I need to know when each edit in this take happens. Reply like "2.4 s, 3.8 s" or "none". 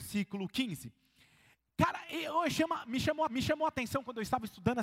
3.3 s